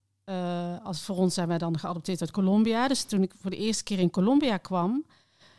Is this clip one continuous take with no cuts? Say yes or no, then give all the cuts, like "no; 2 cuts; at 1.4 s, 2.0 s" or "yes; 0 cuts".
yes; 0 cuts